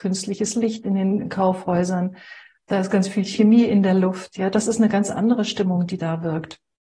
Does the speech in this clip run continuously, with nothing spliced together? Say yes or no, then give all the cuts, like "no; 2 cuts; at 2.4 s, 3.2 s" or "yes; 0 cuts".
yes; 0 cuts